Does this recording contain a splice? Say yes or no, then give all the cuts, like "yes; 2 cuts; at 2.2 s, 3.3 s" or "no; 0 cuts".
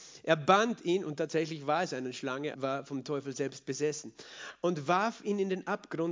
yes; 1 cut; at 2.5 s